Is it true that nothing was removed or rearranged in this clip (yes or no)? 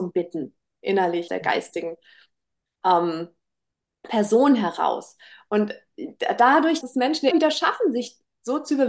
no